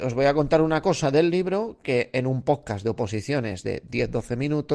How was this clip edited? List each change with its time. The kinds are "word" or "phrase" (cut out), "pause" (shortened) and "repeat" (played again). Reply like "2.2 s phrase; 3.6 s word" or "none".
none